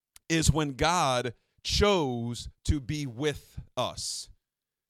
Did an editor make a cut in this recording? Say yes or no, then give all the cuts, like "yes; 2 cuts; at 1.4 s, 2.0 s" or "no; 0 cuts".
no; 0 cuts